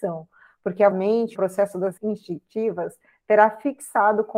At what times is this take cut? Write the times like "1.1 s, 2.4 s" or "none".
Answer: 0.9 s, 1.3 s, 2.0 s

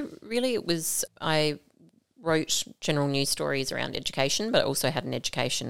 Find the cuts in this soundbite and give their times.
1.1 s

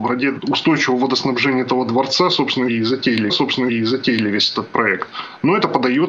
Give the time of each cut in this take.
3.3 s

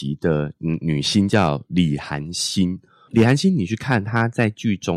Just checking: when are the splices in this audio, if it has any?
3.1 s

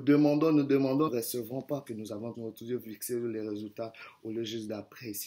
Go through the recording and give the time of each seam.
1.1 s, 1.9 s, 2.3 s

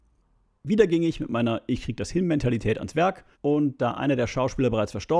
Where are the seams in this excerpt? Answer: 3.3 s

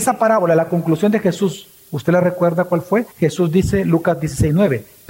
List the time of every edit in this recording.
3.1 s

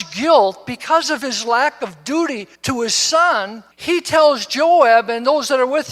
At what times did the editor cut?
2.6 s, 3.7 s

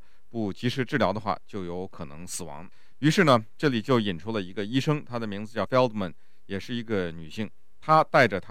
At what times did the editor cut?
5.7 s

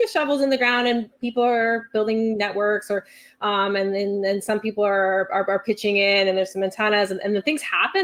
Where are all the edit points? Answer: none

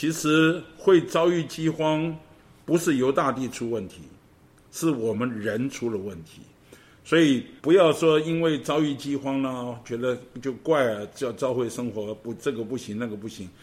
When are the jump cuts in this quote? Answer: 7.6 s

